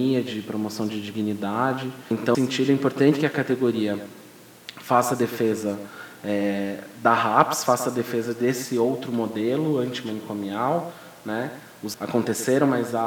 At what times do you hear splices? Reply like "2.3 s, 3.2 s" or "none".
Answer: 2.3 s, 11.9 s